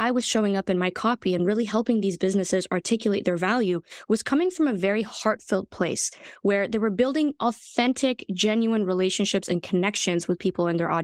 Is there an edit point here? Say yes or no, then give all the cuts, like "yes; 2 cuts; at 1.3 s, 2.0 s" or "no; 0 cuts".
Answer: no; 0 cuts